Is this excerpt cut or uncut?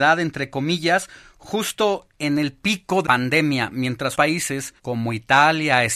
cut